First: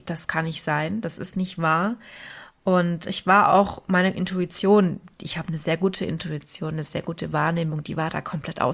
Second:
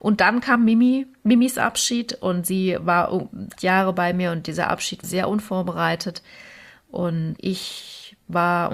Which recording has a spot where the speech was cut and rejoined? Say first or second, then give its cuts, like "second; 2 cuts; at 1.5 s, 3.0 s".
second; 3 cuts; at 3.6 s, 5.0 s, 7.4 s